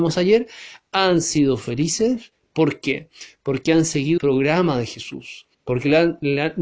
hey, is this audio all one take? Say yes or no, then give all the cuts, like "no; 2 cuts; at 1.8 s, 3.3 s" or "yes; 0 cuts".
no; 2 cuts; at 4.2 s, 5.5 s